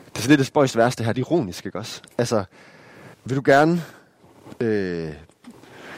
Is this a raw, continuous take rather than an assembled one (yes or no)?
no